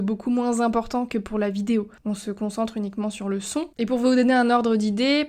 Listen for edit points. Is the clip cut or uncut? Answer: cut